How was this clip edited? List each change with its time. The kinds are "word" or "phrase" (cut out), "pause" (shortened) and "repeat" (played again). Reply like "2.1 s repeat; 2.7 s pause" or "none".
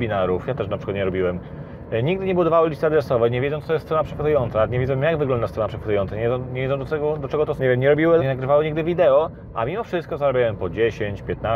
7.6 s word; 8.2 s word